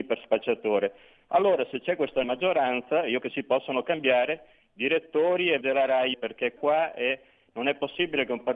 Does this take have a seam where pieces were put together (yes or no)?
yes